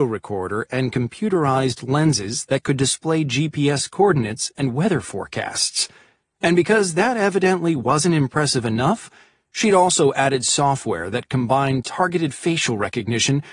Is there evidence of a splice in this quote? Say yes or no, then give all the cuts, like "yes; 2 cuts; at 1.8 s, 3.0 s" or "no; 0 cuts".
no; 0 cuts